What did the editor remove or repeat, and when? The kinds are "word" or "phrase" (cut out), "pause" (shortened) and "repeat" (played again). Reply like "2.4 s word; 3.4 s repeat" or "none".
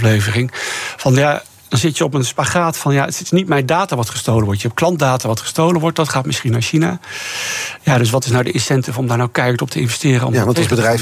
none